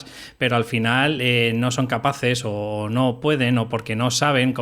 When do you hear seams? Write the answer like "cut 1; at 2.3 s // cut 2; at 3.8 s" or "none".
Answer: none

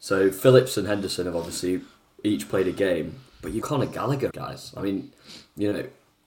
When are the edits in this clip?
cut 1; at 3.6 s // cut 2; at 4.3 s

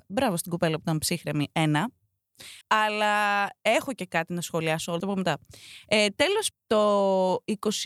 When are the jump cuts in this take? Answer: cut 1; at 2.6 s // cut 2; at 5.0 s // cut 3; at 6.5 s

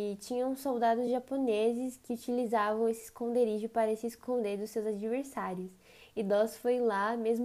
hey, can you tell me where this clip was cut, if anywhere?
none

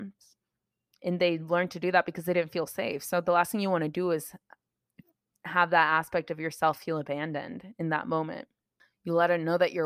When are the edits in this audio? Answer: none

